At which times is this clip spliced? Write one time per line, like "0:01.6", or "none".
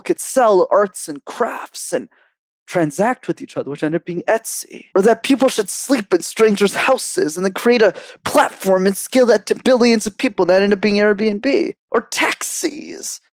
0:04.9